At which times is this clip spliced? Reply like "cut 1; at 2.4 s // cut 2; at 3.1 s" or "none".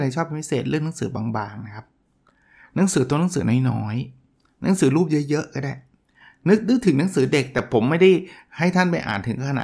none